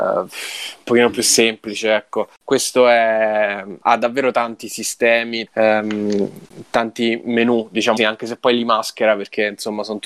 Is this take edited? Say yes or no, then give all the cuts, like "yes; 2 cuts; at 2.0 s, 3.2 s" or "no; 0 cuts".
yes; 3 cuts; at 3.8 s, 5.5 s, 8.0 s